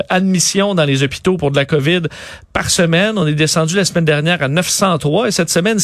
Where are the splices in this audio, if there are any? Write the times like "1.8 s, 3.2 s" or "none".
none